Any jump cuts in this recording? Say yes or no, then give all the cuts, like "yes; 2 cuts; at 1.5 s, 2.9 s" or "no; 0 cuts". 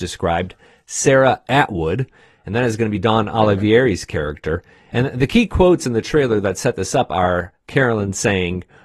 no; 0 cuts